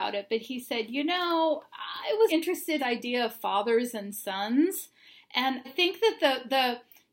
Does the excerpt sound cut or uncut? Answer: cut